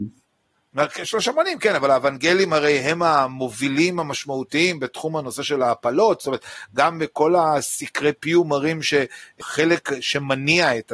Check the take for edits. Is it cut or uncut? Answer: uncut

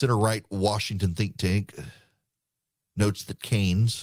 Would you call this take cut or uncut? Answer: uncut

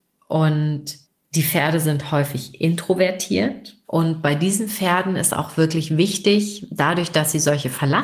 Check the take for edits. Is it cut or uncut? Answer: cut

